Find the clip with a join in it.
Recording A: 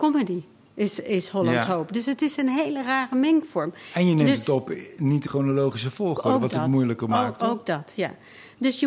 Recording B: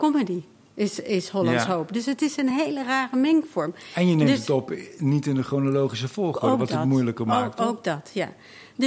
A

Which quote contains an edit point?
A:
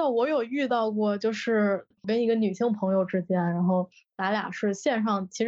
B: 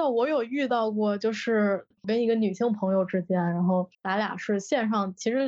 B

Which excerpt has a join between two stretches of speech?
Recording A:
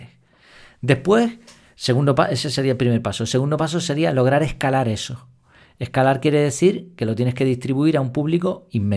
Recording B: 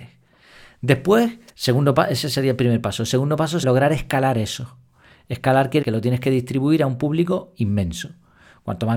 B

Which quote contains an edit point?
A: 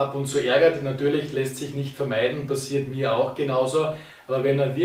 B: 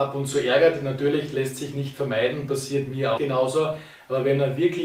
B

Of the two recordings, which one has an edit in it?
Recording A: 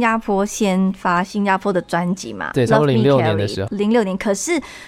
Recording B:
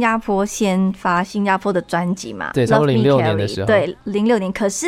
A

